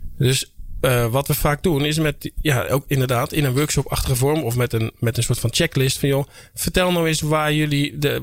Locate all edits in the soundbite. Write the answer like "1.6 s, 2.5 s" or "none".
none